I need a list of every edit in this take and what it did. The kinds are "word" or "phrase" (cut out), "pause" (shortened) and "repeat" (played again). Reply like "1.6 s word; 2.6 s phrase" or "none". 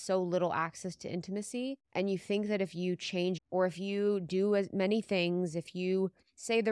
1.8 s pause; 3.4 s word